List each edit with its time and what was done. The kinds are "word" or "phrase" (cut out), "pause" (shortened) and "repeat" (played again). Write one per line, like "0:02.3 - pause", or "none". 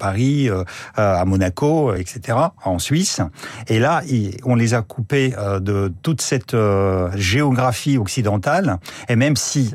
none